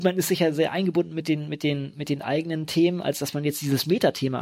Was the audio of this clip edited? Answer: no; 0 cuts

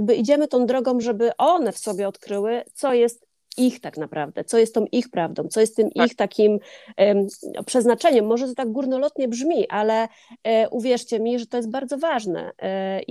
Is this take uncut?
yes; 0 cuts

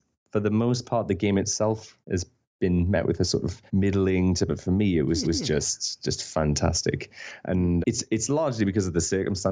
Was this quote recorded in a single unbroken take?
no; 5 cuts; at 2.0 s, 3.7 s, 4.5 s, 5.2 s, 7.8 s

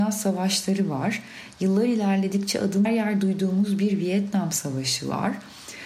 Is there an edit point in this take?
yes; 1 cut; at 2.8 s

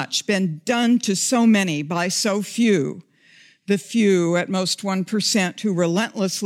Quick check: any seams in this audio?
no; 0 cuts

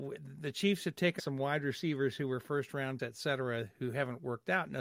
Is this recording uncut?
no; 2 cuts; at 1.2 s, 3.0 s

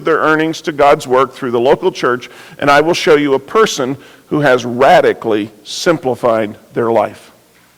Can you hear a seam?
no; 0 cuts

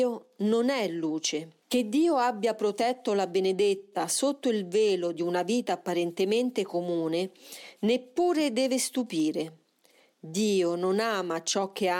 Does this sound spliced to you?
yes; 1 cut; at 1.6 s

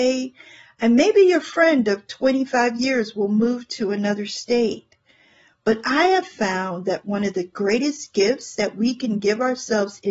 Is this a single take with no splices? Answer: yes; 0 cuts

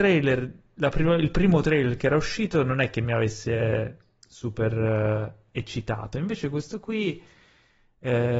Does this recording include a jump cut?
no; 0 cuts

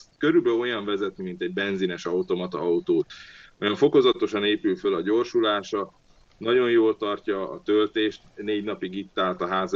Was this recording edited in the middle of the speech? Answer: no; 0 cuts

